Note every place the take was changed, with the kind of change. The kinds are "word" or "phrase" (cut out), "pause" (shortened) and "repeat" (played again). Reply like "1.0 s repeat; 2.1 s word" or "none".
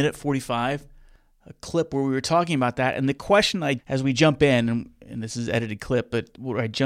3.8 s word